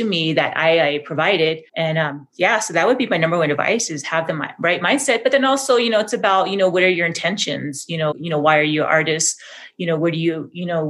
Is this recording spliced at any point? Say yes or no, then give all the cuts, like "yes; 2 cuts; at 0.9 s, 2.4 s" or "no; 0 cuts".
yes; 2 cuts; at 1.7 s, 8.1 s